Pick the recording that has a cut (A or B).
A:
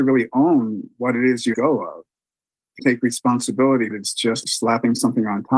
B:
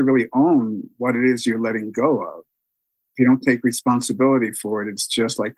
A